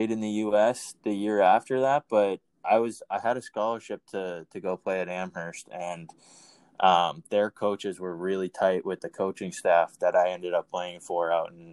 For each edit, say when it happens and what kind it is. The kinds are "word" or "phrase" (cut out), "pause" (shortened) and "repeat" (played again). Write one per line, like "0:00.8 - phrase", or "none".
none

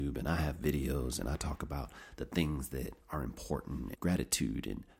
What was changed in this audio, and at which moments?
0:03.0 - pause
0:03.9 - word

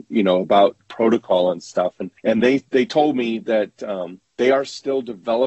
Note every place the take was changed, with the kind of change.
0:02.2 - pause
0:02.7 - pause
0:04.3 - pause

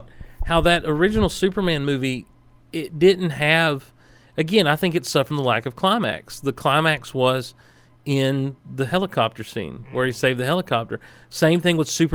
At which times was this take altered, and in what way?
0:05.3 - word

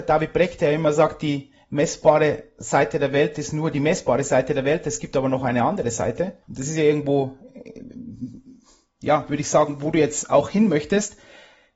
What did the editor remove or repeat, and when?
0:06.4 - pause

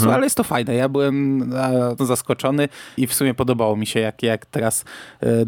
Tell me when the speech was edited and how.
0:02.0 - word
0:03.0 - word

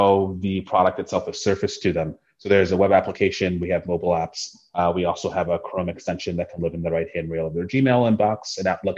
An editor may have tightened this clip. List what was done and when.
none

